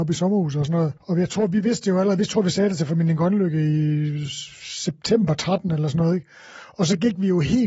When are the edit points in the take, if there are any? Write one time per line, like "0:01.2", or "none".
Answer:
0:01.0